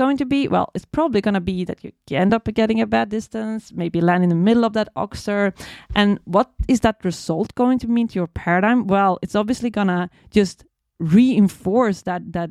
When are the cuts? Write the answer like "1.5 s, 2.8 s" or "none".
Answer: none

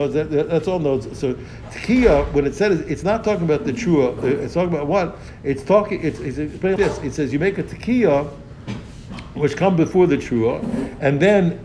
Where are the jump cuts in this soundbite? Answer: 6.8 s

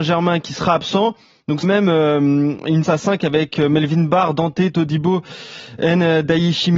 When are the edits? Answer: 1.6 s, 2.8 s

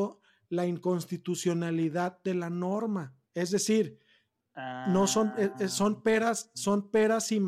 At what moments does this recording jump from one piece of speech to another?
3.3 s

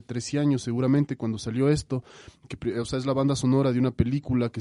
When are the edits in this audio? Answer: none

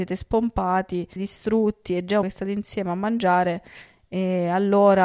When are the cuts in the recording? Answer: 1.2 s, 2.2 s

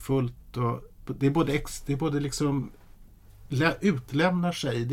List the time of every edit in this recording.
none

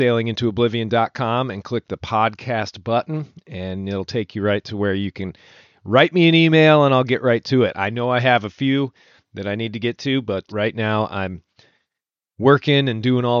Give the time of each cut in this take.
10.5 s

